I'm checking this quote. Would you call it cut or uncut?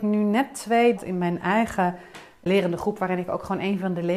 cut